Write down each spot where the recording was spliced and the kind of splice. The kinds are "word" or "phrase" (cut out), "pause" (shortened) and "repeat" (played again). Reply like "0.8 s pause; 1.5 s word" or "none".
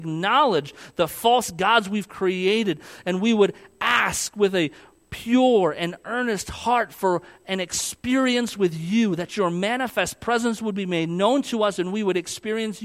none